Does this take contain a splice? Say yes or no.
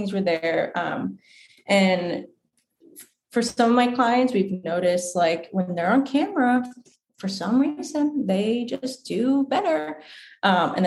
no